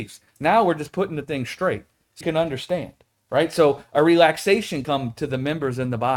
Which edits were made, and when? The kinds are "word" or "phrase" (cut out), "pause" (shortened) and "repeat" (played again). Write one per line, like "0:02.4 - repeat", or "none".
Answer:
0:02.2 - word
0:04.8 - word